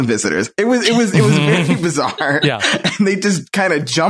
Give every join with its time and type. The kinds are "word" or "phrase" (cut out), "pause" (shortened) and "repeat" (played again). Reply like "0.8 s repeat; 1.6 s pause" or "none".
none